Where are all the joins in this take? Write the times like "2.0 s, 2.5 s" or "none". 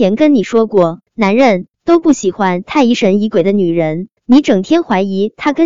1.1 s, 1.7 s, 4.2 s